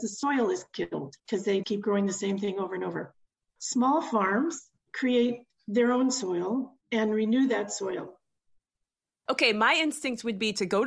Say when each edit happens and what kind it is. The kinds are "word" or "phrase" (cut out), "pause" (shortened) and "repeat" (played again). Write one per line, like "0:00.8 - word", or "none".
0:01.2 - pause
0:01.6 - word
0:06.8 - pause